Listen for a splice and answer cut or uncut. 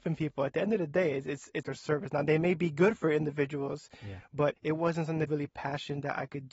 cut